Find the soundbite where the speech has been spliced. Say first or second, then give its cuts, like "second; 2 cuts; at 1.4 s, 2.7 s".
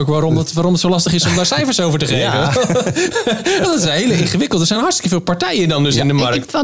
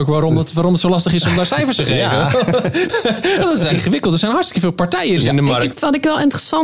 second; 3 cuts; at 1.8 s, 3.7 s, 5.2 s